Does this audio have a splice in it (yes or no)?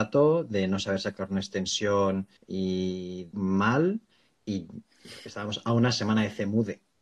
yes